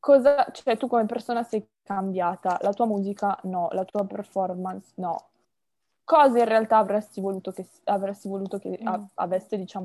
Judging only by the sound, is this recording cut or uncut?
cut